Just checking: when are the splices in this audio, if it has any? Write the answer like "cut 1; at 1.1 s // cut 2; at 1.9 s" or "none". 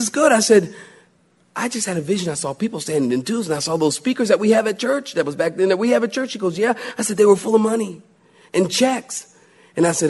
none